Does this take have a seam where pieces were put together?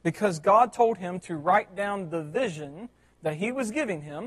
no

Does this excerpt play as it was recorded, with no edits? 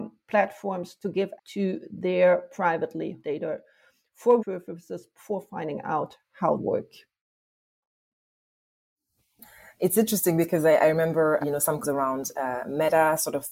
no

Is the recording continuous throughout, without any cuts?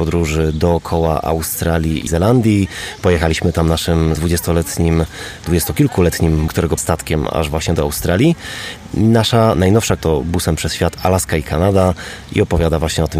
no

